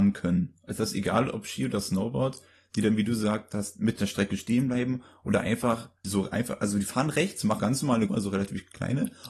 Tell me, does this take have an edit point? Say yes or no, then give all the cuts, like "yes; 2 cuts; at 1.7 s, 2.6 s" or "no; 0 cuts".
yes; 4 cuts; at 4.0 s, 6.0 s, 7.6 s, 8.1 s